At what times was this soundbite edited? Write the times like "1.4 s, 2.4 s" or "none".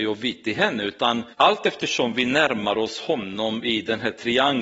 1.3 s